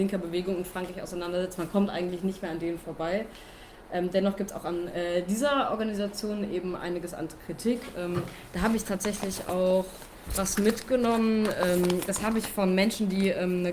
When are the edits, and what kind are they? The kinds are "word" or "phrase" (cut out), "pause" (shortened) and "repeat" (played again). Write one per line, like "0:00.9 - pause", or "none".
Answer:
none